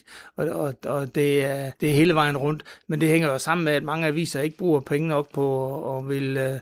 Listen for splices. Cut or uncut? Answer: cut